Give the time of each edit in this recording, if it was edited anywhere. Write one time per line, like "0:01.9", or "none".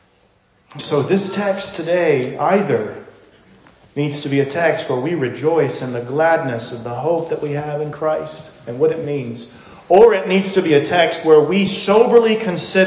none